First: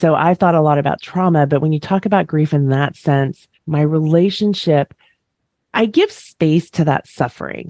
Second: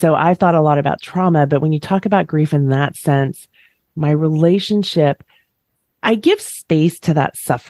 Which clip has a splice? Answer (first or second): first